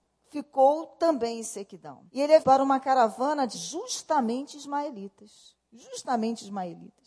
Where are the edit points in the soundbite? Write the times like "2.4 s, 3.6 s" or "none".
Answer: 2.1 s, 2.4 s, 3.5 s